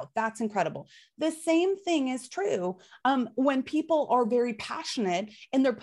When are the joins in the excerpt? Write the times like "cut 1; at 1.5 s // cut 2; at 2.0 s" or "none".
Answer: none